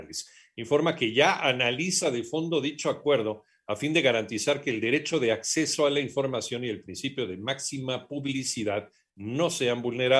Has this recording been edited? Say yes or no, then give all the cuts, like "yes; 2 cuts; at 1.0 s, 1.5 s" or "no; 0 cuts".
no; 0 cuts